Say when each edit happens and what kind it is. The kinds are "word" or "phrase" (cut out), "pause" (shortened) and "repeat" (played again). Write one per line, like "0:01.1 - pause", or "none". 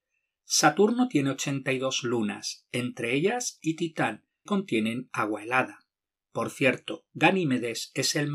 0:03.6 - word
0:04.5 - word